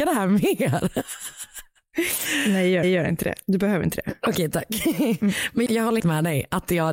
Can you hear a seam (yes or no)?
yes